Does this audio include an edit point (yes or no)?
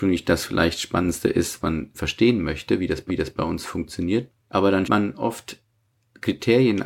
yes